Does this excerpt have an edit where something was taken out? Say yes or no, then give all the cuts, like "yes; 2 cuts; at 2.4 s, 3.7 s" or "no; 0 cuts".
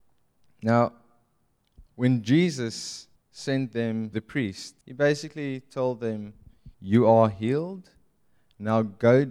yes; 5 cuts; at 1.9 s, 3.2 s, 4.1 s, 4.8 s, 6.7 s